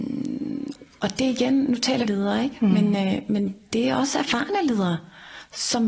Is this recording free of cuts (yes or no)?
no